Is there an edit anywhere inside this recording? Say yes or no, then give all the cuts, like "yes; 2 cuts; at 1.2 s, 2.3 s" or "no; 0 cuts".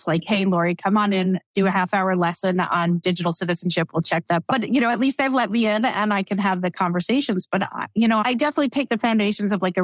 no; 0 cuts